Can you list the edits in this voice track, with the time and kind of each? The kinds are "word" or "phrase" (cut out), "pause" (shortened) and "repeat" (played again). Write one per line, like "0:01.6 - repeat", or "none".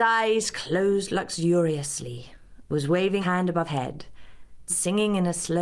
0:03.2 - word
0:03.7 - word
0:04.7 - word